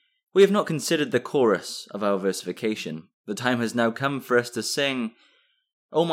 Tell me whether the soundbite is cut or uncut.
cut